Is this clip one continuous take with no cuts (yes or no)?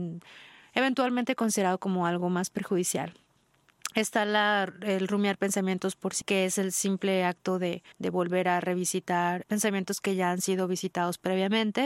no